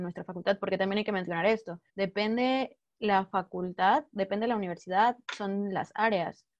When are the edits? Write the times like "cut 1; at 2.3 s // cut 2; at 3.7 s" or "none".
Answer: cut 1; at 1.9 s